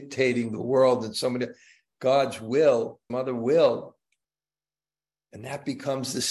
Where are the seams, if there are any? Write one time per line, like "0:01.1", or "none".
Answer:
0:03.1